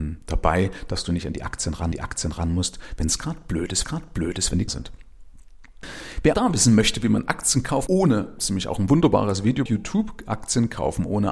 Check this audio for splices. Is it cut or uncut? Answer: cut